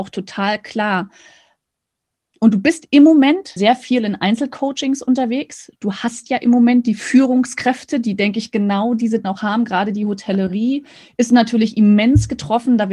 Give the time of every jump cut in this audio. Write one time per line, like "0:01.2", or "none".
0:03.6
0:09.2